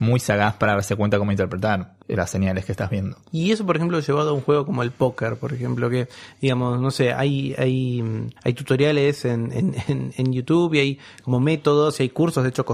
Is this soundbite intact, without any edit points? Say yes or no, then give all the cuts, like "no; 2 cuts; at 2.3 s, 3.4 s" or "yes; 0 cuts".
no; 3 cuts; at 2.0 s, 3.2 s, 8.4 s